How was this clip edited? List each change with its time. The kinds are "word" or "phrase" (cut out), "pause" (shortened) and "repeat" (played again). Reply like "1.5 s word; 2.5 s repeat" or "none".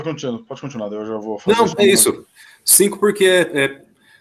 none